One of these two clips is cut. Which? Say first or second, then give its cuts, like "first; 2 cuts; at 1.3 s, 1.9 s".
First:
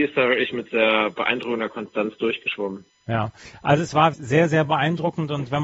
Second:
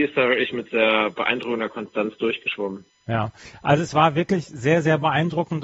first; 1 cut; at 4.1 s